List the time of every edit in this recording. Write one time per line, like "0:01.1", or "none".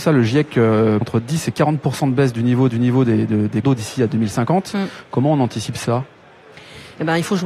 0:01.0
0:02.7
0:03.6